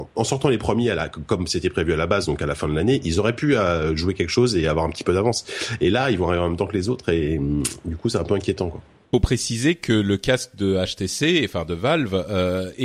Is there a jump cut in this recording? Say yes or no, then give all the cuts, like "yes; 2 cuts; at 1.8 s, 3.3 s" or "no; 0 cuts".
no; 0 cuts